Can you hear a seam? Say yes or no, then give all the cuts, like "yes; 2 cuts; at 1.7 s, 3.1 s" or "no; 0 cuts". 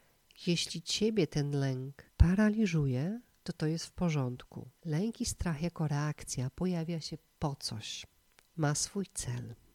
yes; 2 cuts; at 2.1 s, 4.8 s